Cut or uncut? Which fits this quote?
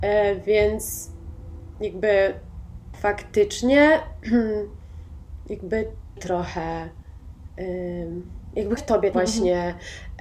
cut